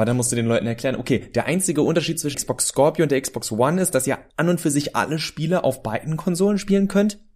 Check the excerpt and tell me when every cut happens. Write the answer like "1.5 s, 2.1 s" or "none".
2.3 s